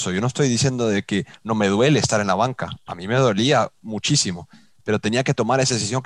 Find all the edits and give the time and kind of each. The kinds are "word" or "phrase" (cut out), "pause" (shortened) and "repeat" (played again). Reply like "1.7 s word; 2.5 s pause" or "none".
none